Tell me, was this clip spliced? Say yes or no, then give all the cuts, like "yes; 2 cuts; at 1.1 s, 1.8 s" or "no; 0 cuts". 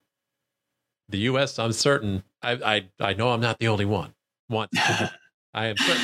no; 0 cuts